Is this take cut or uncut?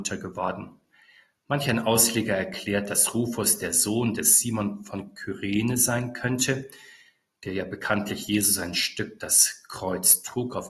uncut